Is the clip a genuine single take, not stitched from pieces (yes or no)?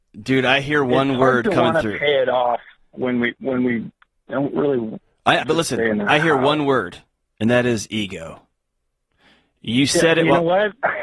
no